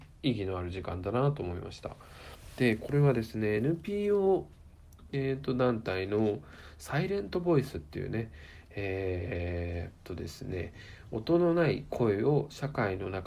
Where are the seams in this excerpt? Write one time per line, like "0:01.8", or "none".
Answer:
none